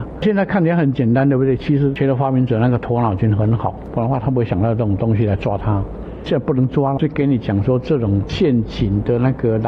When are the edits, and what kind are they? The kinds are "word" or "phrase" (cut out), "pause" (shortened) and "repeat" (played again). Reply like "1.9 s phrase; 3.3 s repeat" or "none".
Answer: 7.0 s word